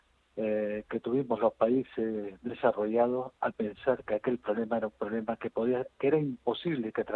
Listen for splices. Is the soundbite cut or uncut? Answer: uncut